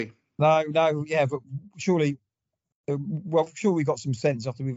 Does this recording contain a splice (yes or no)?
no